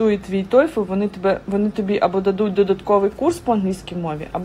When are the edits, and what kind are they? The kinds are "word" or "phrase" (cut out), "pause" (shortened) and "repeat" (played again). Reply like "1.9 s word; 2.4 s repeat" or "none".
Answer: none